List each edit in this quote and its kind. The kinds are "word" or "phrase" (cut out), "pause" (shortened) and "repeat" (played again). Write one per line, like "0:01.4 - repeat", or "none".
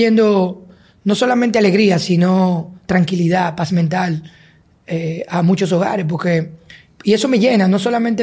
none